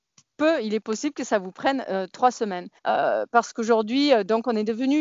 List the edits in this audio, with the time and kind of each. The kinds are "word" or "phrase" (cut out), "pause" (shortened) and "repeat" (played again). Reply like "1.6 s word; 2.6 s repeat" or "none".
2.8 s pause